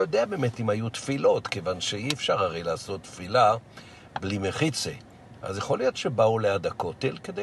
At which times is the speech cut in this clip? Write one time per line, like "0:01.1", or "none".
none

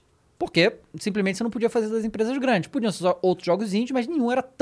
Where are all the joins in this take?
none

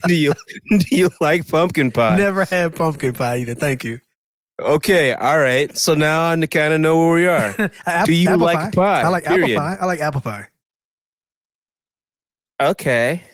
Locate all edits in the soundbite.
none

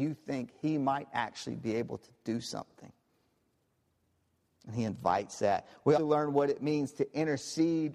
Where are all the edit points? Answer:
0:06.0

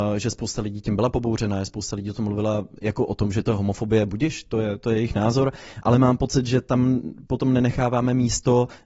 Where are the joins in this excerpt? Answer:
0:02.8

